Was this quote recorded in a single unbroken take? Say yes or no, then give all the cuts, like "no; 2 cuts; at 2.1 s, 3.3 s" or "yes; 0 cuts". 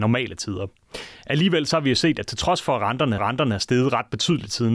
no; 1 cut; at 3.2 s